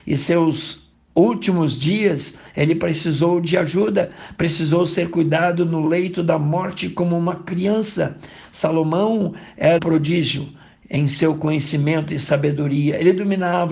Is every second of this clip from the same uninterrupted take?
no; 2 cuts; at 0.9 s, 9.8 s

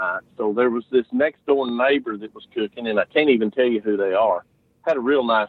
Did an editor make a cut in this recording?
no; 0 cuts

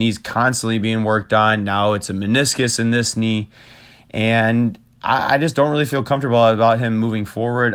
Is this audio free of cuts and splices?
yes; 0 cuts

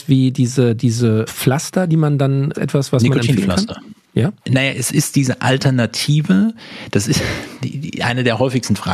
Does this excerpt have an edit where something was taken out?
yes; 4 cuts; at 1.3 s, 2.5 s, 4.4 s, 5.1 s

